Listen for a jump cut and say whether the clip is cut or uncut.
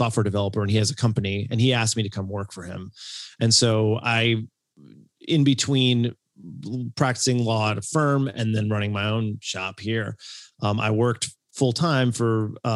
uncut